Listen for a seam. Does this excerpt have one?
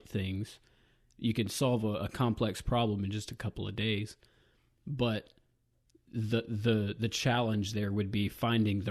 no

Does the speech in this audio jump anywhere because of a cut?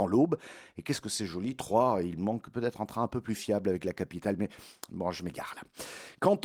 no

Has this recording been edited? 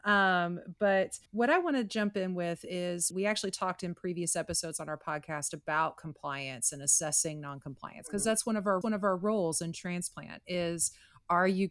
yes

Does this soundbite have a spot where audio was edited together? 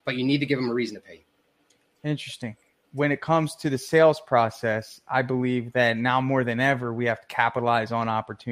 no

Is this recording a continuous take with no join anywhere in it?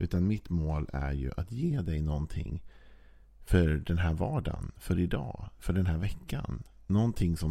yes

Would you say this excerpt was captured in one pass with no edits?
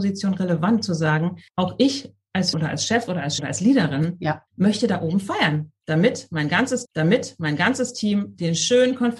no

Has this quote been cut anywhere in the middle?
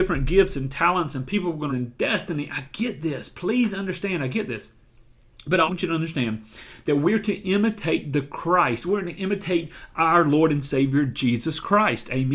yes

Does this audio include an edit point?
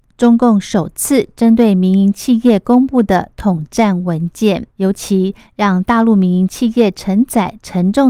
yes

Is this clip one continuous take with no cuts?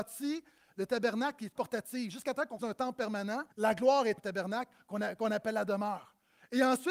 no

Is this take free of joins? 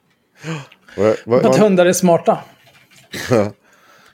no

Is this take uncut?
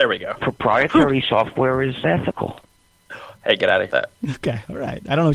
no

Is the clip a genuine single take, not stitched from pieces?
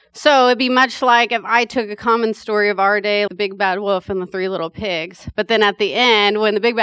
no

